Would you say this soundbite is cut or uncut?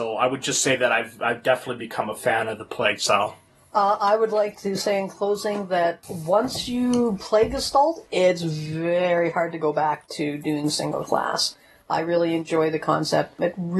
uncut